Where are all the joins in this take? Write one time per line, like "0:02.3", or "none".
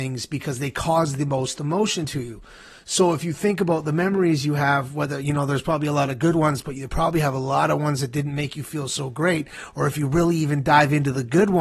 none